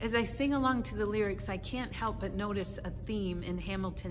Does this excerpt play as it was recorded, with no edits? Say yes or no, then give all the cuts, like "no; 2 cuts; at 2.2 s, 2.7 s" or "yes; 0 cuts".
yes; 0 cuts